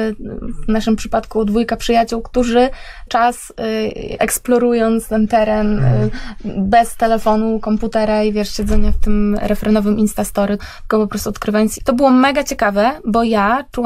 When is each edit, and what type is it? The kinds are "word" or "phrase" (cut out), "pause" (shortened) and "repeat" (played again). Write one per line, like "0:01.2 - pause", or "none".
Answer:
0:03.1 - word
0:04.2 - word
0:10.6 - word
0:11.8 - word

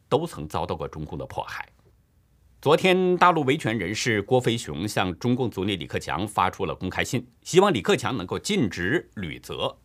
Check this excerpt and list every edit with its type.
0:01.9 - pause
0:07.4 - pause

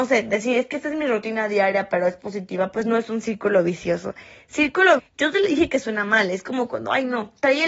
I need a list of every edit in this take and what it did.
0:05.0 - word

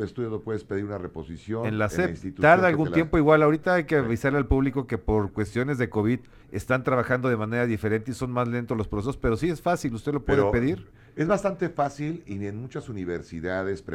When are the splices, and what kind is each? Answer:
0:06.4 - pause

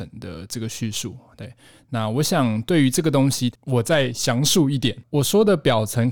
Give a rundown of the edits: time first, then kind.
none

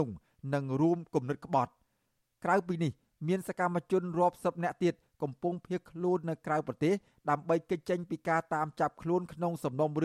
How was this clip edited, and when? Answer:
none

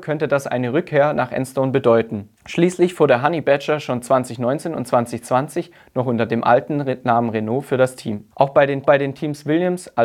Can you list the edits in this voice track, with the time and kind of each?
0:02.4 - pause
0:08.3 - pause
0:08.8 - repeat

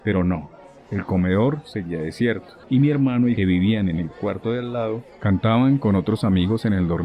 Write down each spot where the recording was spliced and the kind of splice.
0:02.6 - pause
0:03.4 - phrase

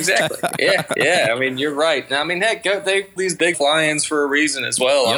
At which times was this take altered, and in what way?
0:03.2 - word
0:03.5 - word

